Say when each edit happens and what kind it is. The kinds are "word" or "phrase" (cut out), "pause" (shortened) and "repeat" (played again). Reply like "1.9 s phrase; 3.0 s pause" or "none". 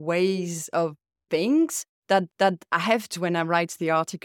1.3 s word; 2.3 s repeat; 3.1 s word